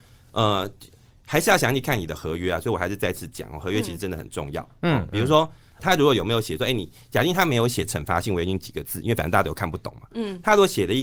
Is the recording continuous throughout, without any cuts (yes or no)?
no